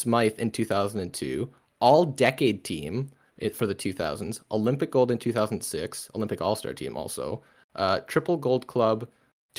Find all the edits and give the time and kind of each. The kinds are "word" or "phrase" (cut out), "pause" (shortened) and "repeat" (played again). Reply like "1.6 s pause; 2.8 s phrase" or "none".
none